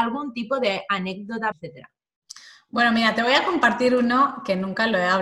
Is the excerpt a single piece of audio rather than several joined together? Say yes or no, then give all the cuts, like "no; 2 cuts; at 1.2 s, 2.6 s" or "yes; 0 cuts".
no; 1 cut; at 1.5 s